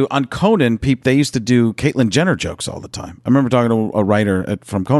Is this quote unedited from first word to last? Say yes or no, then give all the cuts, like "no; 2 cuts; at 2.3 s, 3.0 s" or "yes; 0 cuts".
yes; 0 cuts